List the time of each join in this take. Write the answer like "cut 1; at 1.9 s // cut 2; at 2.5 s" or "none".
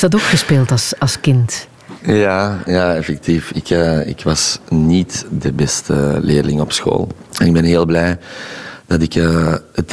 cut 1; at 7.3 s